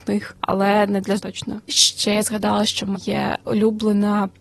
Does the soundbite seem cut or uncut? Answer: cut